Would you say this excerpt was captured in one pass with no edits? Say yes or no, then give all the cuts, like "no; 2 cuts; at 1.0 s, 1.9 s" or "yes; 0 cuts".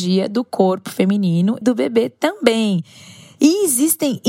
no; 1 cut; at 1.6 s